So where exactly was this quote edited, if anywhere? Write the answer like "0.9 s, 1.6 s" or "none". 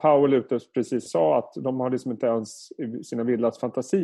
1.1 s